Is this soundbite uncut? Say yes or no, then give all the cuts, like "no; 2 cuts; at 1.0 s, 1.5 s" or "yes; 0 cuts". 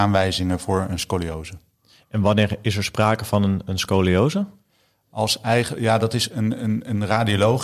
yes; 0 cuts